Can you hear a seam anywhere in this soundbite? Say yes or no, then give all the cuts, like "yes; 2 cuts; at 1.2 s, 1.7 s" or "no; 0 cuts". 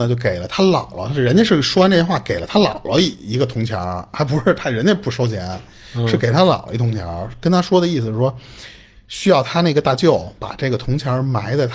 no; 0 cuts